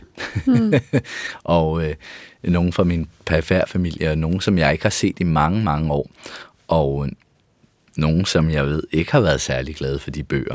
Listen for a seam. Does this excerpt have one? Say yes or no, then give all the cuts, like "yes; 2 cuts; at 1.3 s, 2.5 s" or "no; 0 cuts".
no; 0 cuts